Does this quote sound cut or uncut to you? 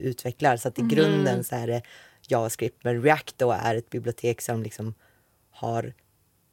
uncut